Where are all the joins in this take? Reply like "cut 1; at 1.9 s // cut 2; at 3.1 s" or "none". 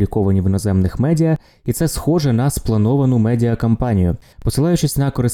none